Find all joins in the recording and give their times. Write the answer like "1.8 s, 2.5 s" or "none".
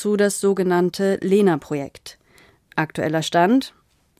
none

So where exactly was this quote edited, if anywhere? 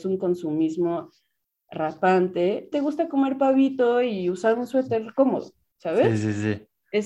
2.7 s

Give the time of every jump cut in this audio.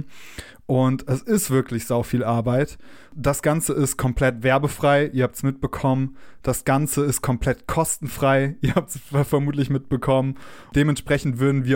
none

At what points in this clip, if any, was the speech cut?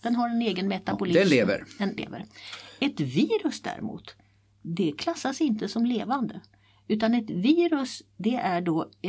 2.0 s

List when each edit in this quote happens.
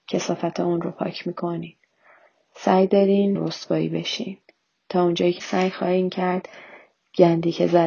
3.3 s, 5.4 s

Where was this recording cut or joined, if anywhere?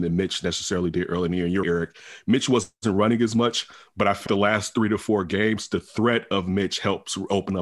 1.6 s, 4.3 s

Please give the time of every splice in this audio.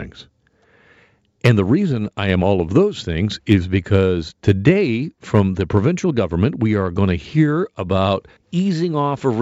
8.4 s

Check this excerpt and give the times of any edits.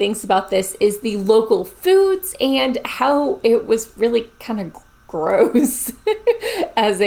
none

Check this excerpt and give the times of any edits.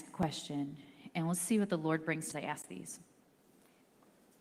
2.3 s

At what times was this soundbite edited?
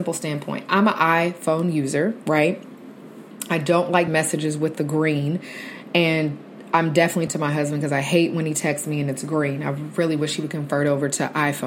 4.1 s, 7.3 s

